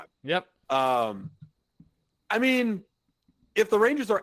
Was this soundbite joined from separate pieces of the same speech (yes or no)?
no